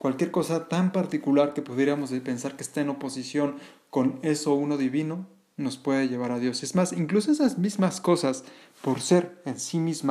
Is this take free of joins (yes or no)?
yes